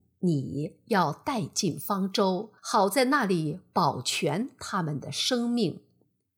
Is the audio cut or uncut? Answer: cut